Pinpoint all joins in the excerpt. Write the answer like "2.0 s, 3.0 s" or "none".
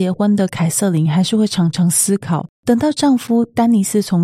2.5 s